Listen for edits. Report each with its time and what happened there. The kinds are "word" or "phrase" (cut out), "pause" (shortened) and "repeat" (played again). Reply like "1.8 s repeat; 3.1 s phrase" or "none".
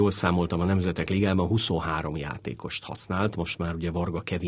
none